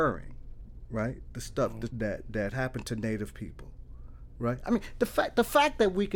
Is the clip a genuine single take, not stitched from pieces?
no; 2 cuts; at 1.9 s, 2.5 s

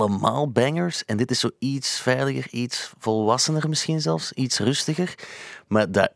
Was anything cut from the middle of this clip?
no; 0 cuts

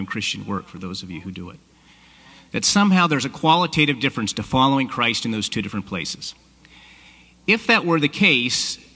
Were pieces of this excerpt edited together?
no; 0 cuts

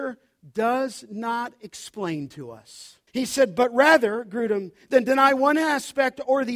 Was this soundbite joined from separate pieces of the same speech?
yes; 1 cut; at 3.1 s

